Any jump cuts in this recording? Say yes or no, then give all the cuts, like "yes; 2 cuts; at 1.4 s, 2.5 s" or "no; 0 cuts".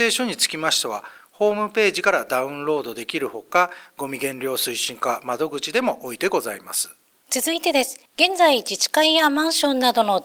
yes; 2 cuts; at 7.0 s, 8.1 s